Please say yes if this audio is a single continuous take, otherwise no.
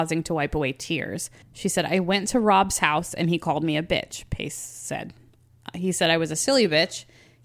no